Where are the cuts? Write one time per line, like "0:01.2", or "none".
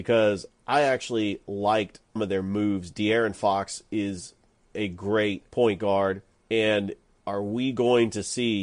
0:02.2
0:05.5